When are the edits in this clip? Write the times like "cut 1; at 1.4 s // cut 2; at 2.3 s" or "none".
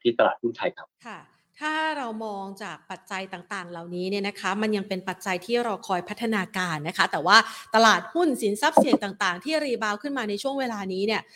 cut 1; at 1.0 s